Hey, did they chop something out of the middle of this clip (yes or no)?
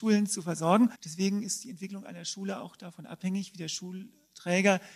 yes